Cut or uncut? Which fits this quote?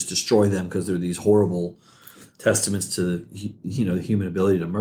uncut